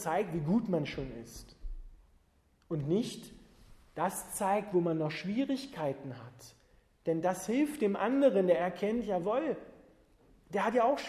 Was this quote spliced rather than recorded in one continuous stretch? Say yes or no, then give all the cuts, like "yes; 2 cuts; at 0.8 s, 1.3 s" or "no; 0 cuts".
no; 0 cuts